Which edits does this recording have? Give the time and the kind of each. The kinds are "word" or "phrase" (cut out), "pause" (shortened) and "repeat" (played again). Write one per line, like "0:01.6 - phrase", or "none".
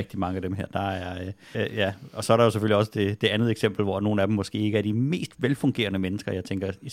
0:01.5 - word